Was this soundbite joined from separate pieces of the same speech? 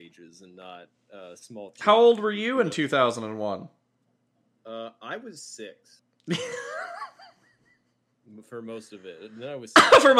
no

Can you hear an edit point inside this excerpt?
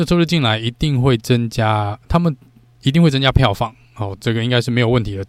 no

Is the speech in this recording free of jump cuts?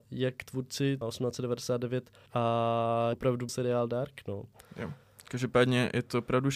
no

